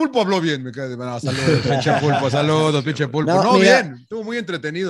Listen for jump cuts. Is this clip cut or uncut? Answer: uncut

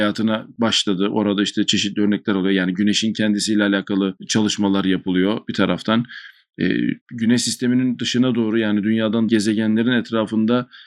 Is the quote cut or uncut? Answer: cut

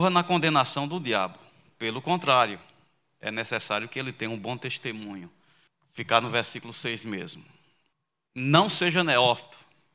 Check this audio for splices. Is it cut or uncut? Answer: uncut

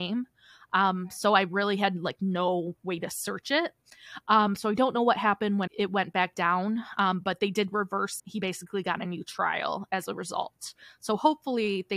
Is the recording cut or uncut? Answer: cut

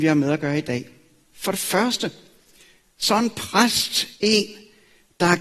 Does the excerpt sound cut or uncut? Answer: uncut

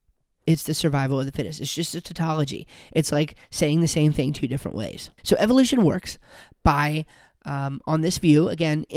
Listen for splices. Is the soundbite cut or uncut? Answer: cut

